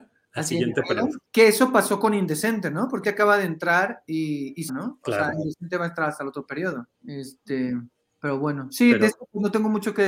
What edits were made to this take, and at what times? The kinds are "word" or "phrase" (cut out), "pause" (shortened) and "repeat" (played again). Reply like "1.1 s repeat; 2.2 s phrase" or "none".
1.3 s pause; 3.0 s word; 4.7 s word; 6.9 s pause